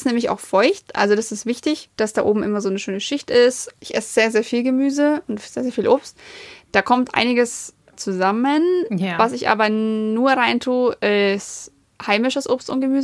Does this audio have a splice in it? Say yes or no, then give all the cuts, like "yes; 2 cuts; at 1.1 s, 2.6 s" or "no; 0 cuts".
no; 0 cuts